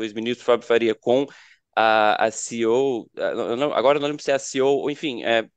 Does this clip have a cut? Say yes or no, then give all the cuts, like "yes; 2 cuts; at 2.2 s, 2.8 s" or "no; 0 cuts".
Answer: no; 0 cuts